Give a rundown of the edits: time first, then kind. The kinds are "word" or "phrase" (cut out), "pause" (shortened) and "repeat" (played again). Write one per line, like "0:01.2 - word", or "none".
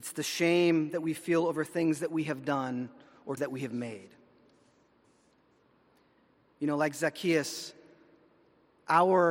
0:03.4 - word

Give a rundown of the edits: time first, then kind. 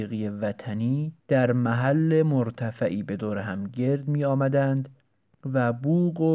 0:01.2 - pause

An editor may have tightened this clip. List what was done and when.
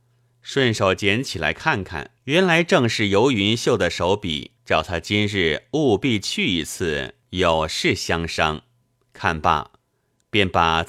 0:02.2 - pause
0:04.6 - pause
0:07.2 - pause
0:08.8 - pause

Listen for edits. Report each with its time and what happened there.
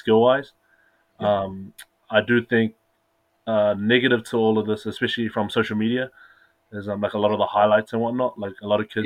none

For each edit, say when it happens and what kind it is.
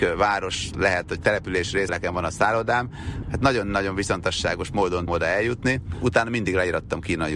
0:01.2 - word
0:01.9 - word
0:03.2 - word
0:05.1 - word

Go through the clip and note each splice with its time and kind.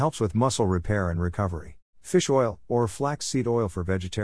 0:01.9 - pause

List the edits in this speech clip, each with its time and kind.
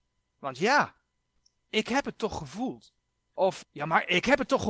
0:03.6 - word

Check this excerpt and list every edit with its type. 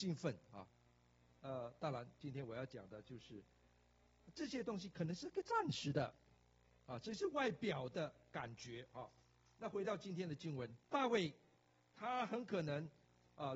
0:10.8 - pause

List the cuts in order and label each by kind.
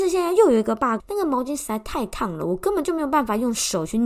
0:01.0 - word

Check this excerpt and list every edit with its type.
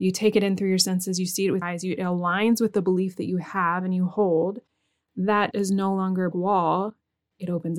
0:01.6 - word
0:05.5 - word
0:06.3 - word

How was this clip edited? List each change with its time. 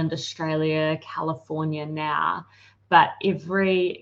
none

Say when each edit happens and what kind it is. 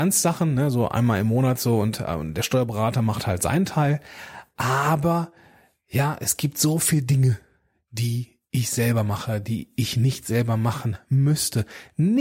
none

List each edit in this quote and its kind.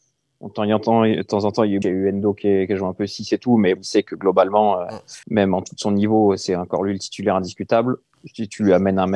0:01.8 - word
0:03.8 - word
0:05.2 - pause

